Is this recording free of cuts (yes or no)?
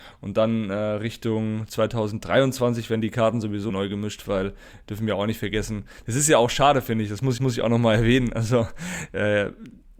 no